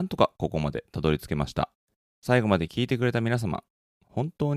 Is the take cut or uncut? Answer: cut